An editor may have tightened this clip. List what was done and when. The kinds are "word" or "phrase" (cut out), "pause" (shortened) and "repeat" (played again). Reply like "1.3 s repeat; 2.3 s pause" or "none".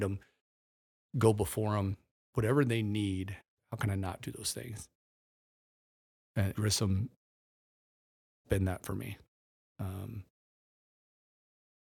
2.3 s word; 6.5 s word; 8.4 s word